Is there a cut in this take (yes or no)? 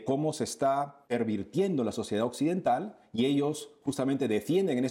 yes